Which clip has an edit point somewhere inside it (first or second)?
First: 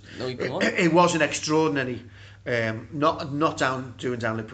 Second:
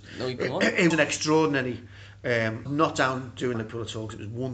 second